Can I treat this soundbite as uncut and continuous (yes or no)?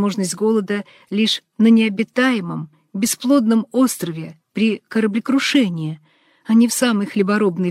yes